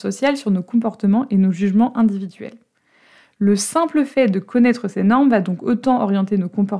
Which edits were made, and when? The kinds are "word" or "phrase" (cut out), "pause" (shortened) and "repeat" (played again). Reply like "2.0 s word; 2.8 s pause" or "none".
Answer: none